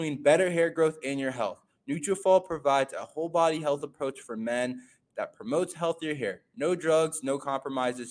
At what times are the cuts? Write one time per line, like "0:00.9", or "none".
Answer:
none